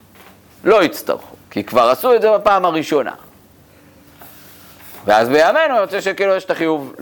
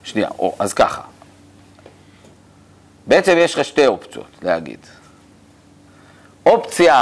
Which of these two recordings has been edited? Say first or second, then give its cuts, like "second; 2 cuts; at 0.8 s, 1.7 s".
first; 1 cut; at 1.4 s